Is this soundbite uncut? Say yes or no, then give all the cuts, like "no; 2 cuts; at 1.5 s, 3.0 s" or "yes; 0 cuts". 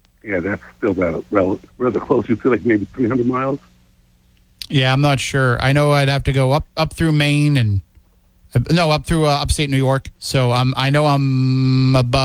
no; 3 cuts; at 1.7 s, 6.7 s, 10.2 s